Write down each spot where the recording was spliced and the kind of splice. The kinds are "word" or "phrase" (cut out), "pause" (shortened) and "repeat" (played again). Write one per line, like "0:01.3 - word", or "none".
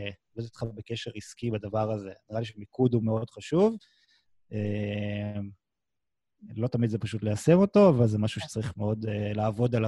none